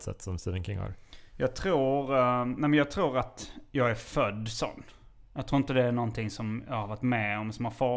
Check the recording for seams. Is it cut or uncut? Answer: uncut